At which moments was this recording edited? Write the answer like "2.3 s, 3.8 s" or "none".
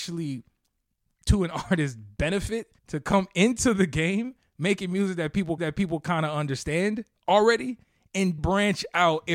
2.8 s, 5.6 s, 8.4 s

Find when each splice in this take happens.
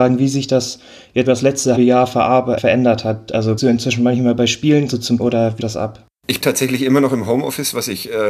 1.3 s, 1.8 s, 2.6 s, 3.6 s, 4.9 s, 5.2 s, 5.6 s, 6.4 s

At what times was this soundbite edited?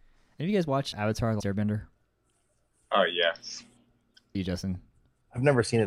0.9 s, 1.4 s, 4.3 s

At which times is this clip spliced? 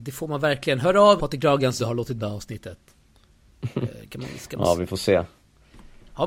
1.2 s, 1.8 s, 2.2 s

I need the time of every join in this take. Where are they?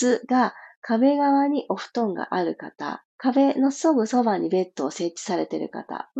3.1 s

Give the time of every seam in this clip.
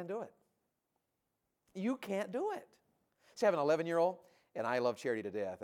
none

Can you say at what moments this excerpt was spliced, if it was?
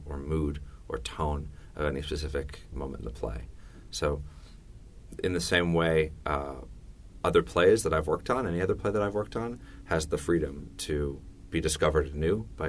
2.7 s

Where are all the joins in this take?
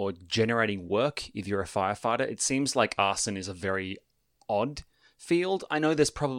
none

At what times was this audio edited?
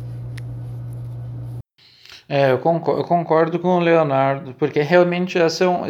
none

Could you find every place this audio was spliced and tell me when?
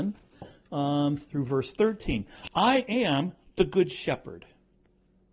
none

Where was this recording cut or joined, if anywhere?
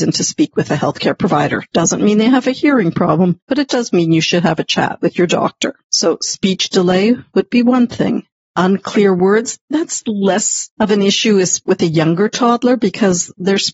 3.4 s, 5.8 s, 8.4 s, 9.6 s

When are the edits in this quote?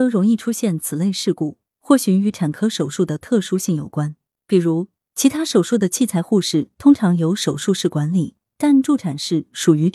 none

